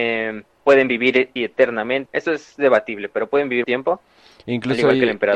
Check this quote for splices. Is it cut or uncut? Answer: cut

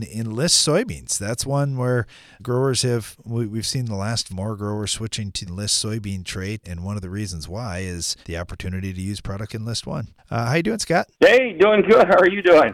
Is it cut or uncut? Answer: cut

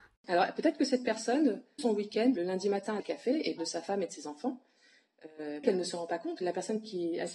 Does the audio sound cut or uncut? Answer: cut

